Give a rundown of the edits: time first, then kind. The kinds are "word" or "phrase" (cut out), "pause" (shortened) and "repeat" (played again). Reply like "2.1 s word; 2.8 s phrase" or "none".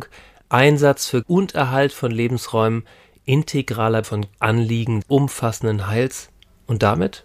1.2 s word; 4.0 s word; 4.3 s word; 5.0 s word